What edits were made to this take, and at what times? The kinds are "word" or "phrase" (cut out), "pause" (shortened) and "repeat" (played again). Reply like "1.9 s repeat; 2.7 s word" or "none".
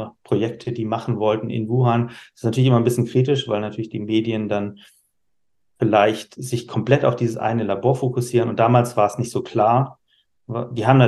none